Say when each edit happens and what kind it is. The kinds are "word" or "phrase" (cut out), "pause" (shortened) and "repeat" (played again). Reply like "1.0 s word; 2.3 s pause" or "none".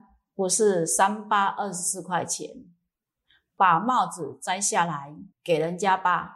5.3 s pause